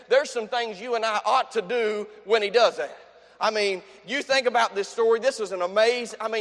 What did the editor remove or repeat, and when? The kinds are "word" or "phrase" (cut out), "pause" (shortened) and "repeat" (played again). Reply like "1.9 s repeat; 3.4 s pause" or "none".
none